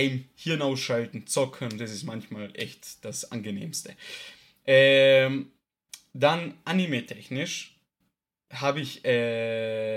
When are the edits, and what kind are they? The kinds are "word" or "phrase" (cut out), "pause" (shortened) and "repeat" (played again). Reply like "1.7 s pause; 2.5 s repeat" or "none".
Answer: none